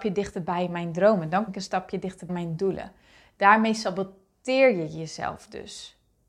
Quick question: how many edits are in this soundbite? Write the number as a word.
two